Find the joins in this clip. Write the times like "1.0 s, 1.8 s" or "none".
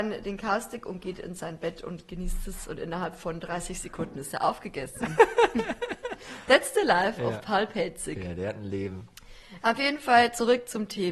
none